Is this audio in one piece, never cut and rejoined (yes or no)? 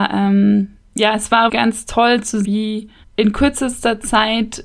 no